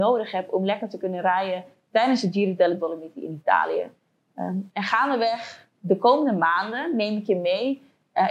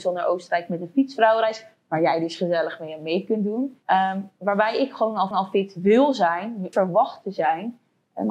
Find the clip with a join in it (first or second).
second